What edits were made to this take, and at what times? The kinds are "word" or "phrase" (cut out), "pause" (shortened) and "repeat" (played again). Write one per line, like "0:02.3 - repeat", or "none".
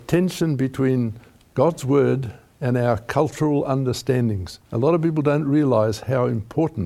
0:04.6 - pause